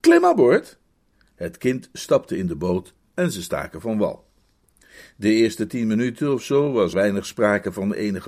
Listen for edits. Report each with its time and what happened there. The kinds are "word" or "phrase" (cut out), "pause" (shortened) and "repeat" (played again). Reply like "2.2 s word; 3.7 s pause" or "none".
1.1 s pause; 6.9 s word